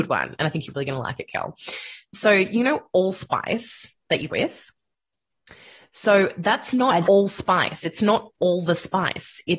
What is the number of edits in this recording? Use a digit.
2